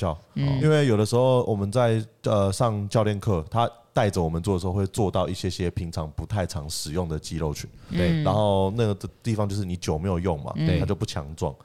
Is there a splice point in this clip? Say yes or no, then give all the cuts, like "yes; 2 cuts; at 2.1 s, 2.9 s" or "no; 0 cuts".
no; 0 cuts